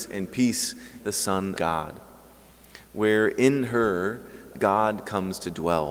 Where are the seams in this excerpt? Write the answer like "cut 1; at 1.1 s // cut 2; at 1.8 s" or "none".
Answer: cut 1; at 1.0 s // cut 2; at 1.6 s // cut 3; at 4.5 s